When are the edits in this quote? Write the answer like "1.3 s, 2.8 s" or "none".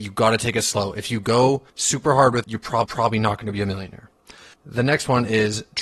1.7 s, 2.4 s, 2.8 s, 4.5 s